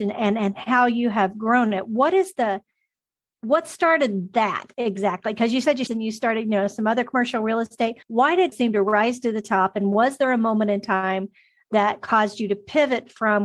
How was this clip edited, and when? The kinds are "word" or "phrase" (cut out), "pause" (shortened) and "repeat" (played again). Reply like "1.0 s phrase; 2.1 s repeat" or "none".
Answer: 5.9 s phrase; 8.0 s pause; 8.5 s word